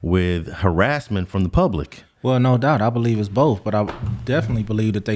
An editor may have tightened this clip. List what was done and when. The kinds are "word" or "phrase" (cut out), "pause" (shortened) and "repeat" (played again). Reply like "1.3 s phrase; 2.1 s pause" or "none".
none